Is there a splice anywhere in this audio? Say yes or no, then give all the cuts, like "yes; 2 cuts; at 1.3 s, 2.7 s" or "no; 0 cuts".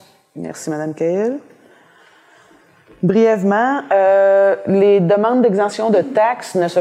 no; 0 cuts